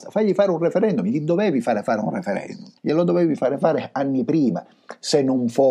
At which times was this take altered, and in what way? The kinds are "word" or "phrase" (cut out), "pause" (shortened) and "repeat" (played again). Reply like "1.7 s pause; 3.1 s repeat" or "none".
2.8 s pause